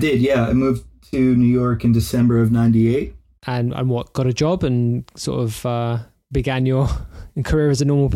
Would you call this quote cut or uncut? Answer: uncut